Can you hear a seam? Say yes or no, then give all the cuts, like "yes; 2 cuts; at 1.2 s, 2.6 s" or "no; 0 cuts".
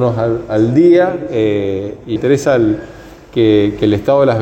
yes; 1 cut; at 2.2 s